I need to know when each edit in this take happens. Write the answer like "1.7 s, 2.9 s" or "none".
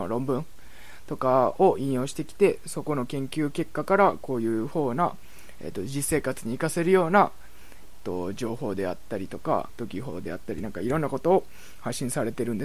7.8 s, 9.7 s